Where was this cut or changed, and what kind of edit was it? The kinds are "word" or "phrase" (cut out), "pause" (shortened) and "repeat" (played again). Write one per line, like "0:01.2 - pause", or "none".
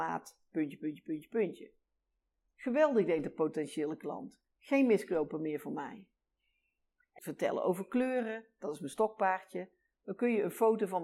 0:07.2 - phrase